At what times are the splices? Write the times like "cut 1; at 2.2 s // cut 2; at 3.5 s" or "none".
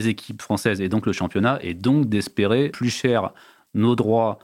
cut 1; at 2.7 s